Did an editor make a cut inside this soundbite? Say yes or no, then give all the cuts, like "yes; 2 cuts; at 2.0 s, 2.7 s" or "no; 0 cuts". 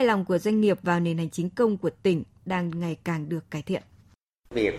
no; 0 cuts